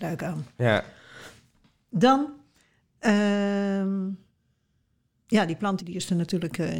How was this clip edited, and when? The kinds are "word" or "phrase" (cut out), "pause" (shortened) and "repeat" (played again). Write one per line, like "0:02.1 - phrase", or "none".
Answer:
0:05.8 - word